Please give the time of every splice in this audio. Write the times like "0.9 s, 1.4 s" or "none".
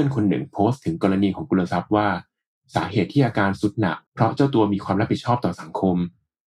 4.1 s

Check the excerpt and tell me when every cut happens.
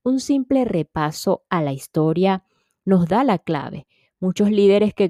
none

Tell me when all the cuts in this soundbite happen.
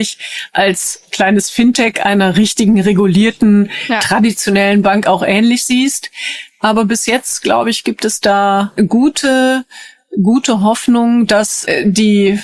none

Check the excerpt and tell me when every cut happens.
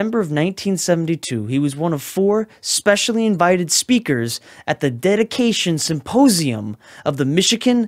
none

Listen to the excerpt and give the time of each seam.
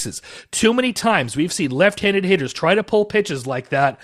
none

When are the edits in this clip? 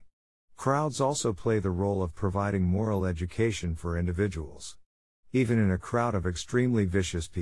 none

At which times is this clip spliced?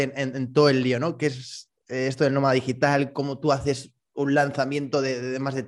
none

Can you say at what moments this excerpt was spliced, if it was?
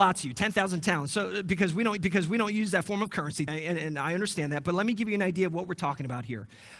2.0 s, 3.5 s

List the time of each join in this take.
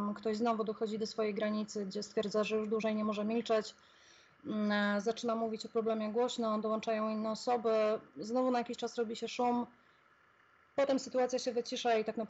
none

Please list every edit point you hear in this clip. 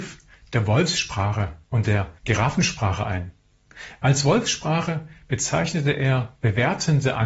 1.6 s, 2.2 s

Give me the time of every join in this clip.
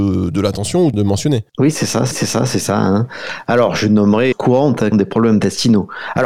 0.9 s, 1.5 s, 2.1 s, 4.3 s, 4.9 s

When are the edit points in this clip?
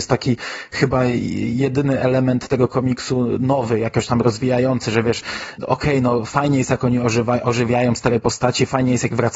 none

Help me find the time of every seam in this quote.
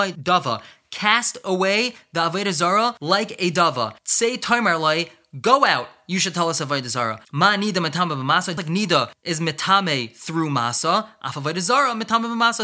4.0 s, 8.6 s

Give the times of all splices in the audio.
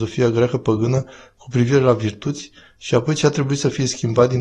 none

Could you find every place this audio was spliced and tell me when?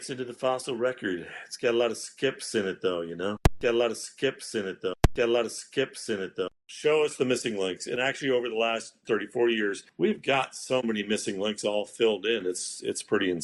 6.5 s

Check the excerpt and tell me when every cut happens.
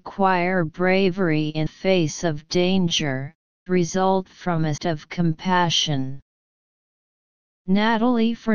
1.7 s, 3.7 s, 4.8 s

